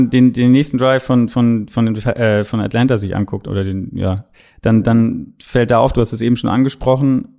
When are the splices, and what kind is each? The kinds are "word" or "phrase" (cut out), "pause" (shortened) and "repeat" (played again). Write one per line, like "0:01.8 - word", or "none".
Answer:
none